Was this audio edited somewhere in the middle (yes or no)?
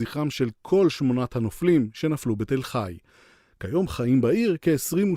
no